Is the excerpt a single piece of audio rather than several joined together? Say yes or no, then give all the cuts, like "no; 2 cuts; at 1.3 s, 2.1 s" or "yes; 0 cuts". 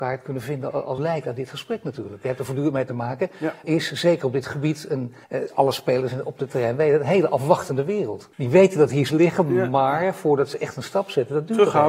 no; 5 cuts; at 1.0 s, 3.6 s, 5.2 s, 8.3 s, 9.1 s